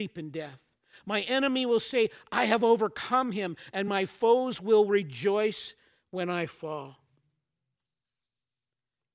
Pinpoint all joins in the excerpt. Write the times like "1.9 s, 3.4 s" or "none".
none